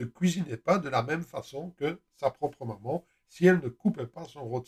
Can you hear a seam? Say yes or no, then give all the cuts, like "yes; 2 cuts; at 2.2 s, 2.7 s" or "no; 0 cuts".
no; 0 cuts